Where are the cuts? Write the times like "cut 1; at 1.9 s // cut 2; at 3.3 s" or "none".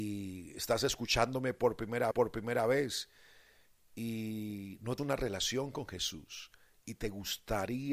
cut 1; at 2.1 s // cut 2; at 5.0 s